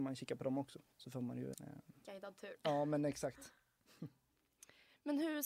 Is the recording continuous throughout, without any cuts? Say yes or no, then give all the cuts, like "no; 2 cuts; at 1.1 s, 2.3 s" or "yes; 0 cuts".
no; 2 cuts; at 0.9 s, 1.5 s